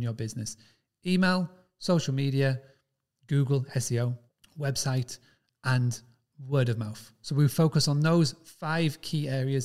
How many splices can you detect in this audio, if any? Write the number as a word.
one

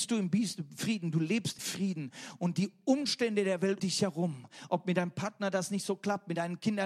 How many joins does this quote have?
two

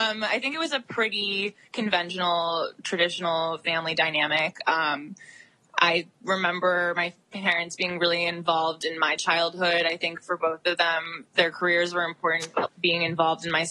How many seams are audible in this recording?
one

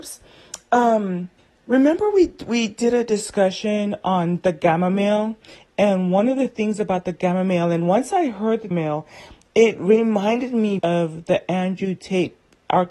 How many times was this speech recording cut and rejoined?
three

